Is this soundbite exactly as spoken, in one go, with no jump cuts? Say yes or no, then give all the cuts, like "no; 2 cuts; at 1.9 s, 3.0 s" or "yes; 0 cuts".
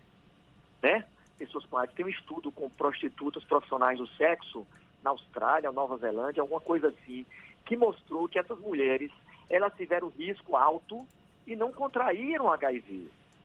yes; 0 cuts